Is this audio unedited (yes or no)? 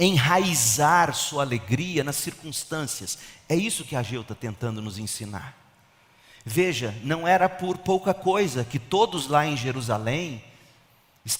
yes